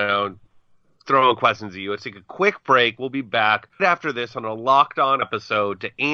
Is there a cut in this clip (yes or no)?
yes